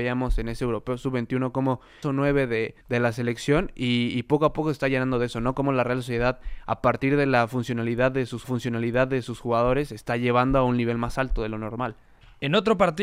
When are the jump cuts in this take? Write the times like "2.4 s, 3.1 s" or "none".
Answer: 2.0 s, 2.8 s, 8.4 s